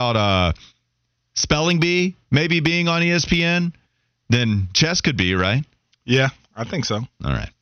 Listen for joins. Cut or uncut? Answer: uncut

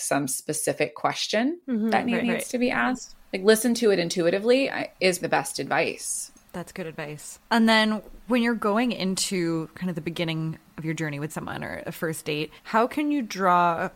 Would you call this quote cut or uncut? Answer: cut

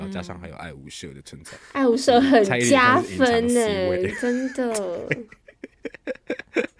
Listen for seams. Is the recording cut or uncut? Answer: uncut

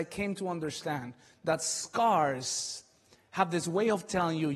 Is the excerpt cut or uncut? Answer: uncut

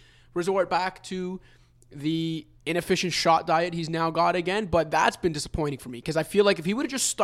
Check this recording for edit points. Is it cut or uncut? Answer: uncut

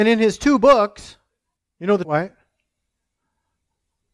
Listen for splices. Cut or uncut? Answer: cut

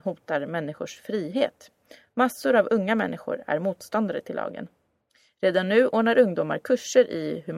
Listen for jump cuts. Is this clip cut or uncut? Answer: uncut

